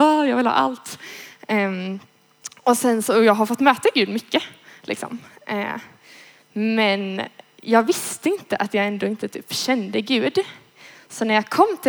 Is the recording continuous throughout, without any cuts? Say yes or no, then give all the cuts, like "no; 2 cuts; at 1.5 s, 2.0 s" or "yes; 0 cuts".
yes; 0 cuts